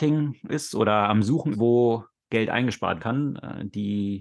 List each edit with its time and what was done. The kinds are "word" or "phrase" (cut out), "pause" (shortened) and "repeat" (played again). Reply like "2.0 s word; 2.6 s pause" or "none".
1.5 s word; 3.0 s word